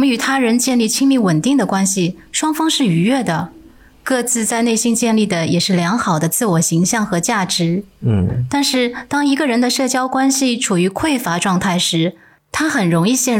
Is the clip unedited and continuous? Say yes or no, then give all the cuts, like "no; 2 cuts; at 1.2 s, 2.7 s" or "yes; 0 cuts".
yes; 0 cuts